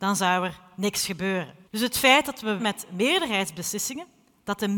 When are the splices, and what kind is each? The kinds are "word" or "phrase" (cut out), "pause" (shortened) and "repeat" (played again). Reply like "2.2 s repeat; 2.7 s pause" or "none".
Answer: 1.7 s pause; 2.6 s word